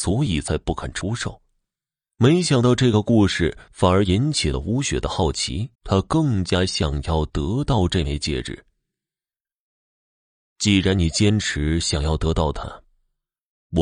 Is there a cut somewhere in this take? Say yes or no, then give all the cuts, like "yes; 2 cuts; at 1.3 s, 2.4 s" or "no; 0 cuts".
yes; 1 cut; at 5.7 s